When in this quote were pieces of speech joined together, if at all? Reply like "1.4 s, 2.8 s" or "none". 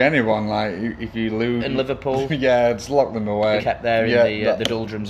1.6 s, 3.6 s